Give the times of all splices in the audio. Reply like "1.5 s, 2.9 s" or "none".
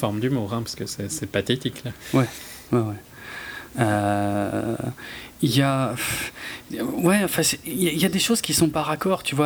none

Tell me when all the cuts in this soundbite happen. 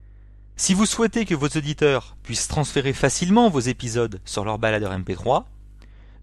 none

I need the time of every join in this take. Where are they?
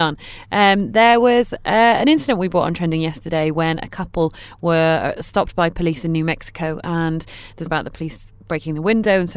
7.7 s

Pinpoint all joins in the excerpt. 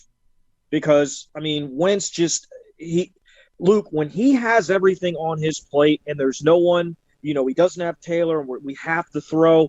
none

